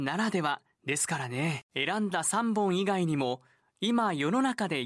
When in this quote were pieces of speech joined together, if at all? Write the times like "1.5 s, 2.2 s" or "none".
1.7 s